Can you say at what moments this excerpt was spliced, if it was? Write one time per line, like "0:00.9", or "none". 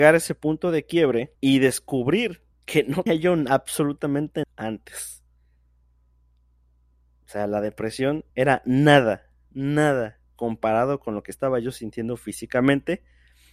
0:01.3
0:02.5
0:03.1
0:04.4
0:08.3